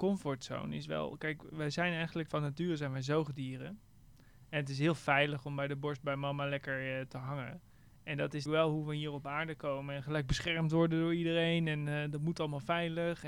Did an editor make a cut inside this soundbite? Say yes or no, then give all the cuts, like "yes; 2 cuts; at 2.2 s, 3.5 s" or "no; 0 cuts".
yes; 2 cuts; at 2.3 s, 8.5 s